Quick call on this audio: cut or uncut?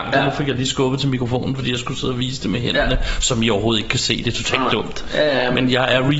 uncut